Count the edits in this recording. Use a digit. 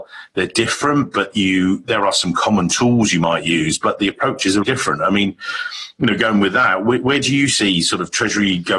1